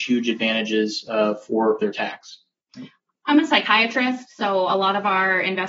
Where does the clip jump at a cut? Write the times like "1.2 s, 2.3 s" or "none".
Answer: 1.8 s